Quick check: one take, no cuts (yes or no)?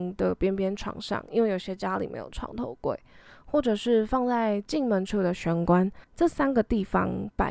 no